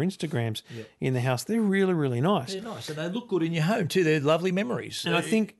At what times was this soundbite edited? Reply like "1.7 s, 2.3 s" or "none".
none